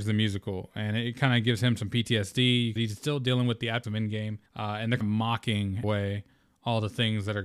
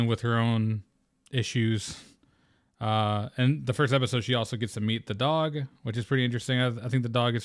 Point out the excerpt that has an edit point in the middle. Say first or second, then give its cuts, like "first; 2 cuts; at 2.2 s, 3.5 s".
first; 5 cuts; at 2.8 s, 3.8 s, 4.5 s, 5.0 s, 5.8 s